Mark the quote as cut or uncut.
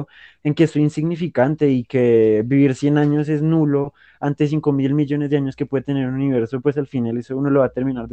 uncut